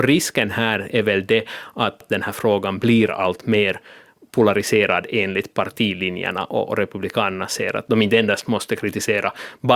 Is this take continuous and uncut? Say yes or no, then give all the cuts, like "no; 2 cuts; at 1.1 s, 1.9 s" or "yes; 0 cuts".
yes; 0 cuts